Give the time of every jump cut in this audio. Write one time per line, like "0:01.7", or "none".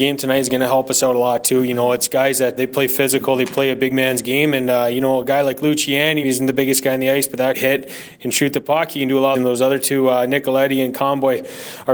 0:02.6
0:06.2
0:07.5
0:09.3